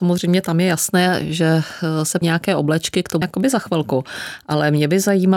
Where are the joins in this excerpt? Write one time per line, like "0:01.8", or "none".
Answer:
0:02.2
0:03.2